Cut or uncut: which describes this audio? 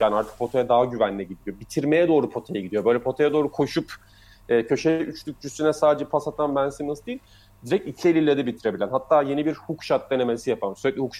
uncut